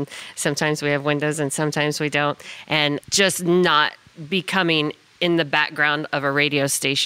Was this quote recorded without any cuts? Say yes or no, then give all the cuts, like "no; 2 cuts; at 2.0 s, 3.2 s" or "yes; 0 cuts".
no; 1 cut; at 3.0 s